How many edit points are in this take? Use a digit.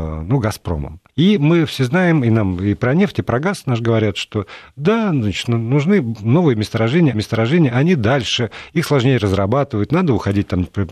2